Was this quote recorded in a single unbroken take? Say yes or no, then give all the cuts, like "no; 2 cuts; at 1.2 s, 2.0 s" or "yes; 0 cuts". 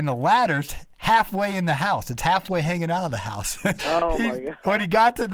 no; 1 cut; at 3.8 s